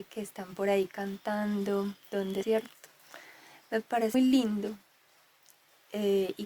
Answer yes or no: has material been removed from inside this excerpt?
yes